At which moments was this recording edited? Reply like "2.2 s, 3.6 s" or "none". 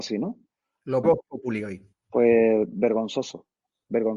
1.0 s, 1.9 s